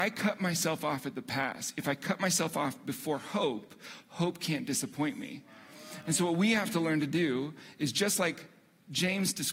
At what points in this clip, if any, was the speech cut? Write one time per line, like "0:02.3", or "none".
none